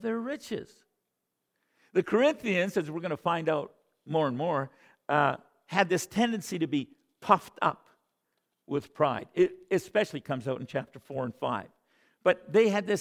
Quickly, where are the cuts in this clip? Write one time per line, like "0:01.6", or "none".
none